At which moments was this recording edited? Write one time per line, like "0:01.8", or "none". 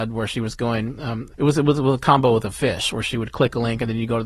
0:01.3